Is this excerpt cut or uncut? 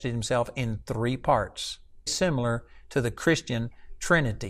cut